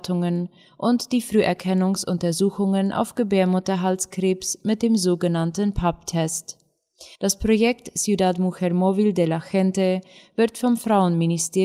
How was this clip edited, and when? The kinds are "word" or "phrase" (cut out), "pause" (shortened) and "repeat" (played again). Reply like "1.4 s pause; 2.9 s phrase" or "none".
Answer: 7.1 s pause